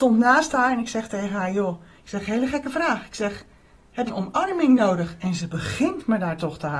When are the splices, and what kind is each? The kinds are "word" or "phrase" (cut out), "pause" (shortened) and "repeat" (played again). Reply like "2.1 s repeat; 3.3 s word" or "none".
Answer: 4.1 s word